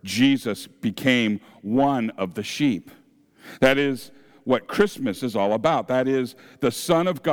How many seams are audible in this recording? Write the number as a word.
zero